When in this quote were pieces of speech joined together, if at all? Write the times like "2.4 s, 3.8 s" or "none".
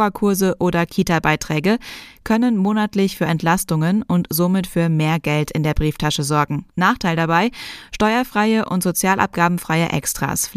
6.7 s